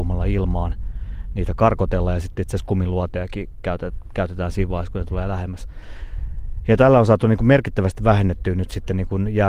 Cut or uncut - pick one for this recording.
uncut